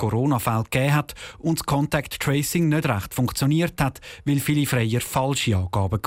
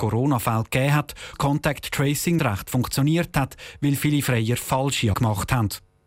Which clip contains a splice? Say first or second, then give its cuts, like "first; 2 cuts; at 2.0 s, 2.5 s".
second; 3 cuts; at 1.3 s, 2.4 s, 5.1 s